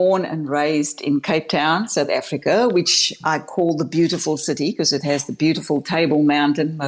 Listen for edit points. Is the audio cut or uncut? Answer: uncut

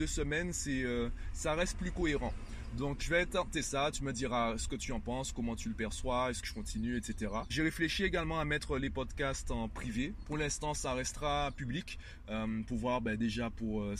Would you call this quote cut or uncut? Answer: cut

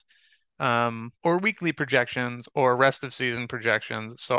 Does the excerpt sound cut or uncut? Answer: cut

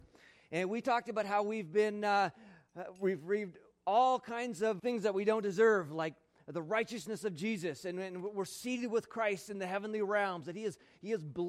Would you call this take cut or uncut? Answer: cut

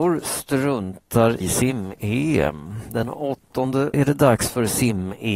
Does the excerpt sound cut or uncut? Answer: cut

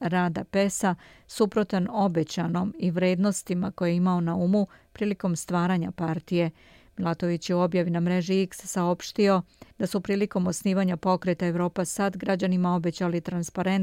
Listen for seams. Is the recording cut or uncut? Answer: cut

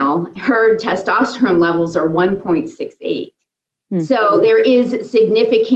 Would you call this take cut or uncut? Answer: uncut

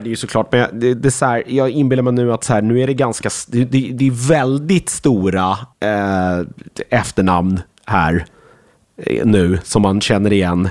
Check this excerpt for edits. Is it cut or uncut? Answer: cut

